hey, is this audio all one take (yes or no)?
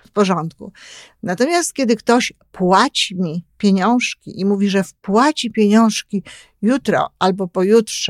yes